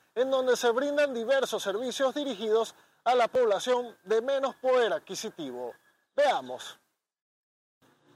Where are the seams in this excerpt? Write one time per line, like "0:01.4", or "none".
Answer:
none